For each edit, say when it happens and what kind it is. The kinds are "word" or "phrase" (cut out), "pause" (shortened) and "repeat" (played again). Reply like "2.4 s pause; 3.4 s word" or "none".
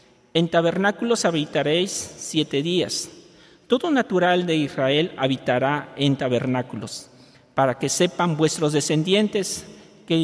none